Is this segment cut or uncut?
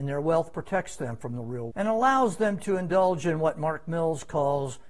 cut